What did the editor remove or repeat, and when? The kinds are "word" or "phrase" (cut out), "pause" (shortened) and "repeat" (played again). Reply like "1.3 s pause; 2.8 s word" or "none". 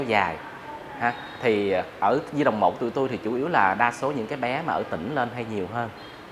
none